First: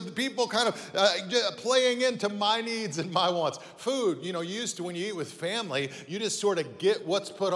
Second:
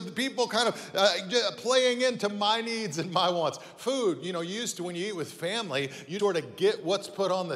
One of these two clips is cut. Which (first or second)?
second